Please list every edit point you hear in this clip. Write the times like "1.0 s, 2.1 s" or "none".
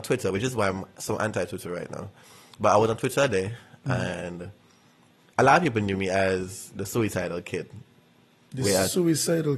none